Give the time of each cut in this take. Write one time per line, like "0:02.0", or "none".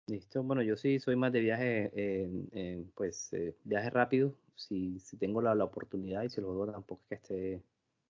0:02.9